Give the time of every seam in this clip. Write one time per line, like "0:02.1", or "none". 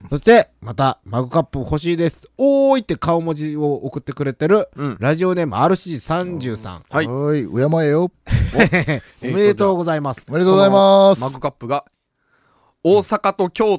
none